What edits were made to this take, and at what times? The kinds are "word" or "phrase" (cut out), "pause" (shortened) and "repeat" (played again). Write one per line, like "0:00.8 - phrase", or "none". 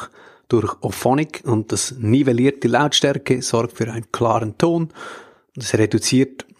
none